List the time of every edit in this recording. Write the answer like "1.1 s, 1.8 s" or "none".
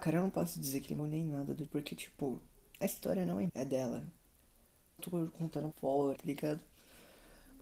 1.0 s, 1.7 s, 3.5 s, 5.0 s, 5.7 s, 6.2 s

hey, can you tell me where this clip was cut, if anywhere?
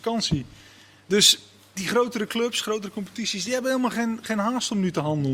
none

